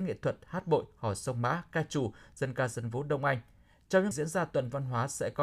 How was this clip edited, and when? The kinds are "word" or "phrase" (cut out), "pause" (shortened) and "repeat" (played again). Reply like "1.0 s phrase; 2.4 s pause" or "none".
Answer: 4.1 s word